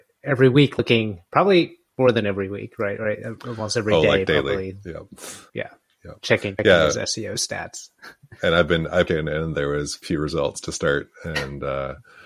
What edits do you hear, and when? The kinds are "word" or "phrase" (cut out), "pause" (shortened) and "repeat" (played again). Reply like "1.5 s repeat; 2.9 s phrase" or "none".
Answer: 5.5 s pause; 9.1 s phrase; 10.0 s word